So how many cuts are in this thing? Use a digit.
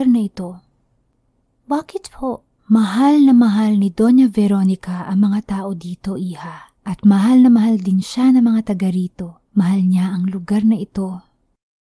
3